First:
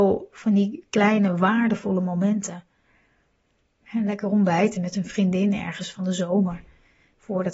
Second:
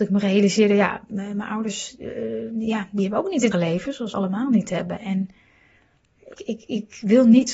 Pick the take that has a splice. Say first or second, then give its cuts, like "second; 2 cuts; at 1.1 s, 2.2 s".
second; 3 cuts; at 3.5 s, 4.1 s, 6.3 s